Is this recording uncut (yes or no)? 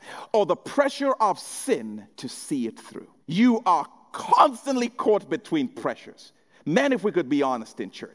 no